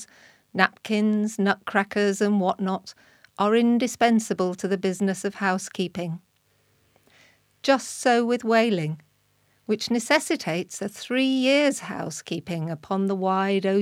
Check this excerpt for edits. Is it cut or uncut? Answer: uncut